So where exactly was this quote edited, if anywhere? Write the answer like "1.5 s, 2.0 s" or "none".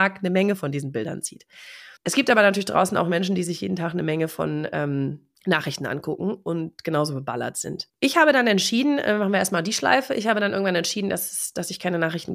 2.0 s, 5.3 s, 7.9 s